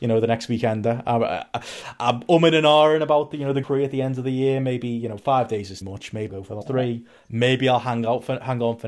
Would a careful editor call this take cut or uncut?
cut